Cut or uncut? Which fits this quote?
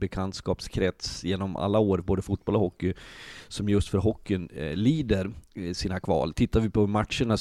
uncut